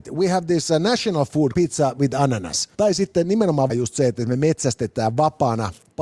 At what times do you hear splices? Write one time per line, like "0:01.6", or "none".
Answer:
0:01.5
0:02.7
0:03.7